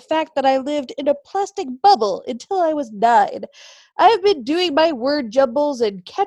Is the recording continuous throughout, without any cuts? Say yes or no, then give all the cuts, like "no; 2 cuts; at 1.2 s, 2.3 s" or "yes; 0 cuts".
yes; 0 cuts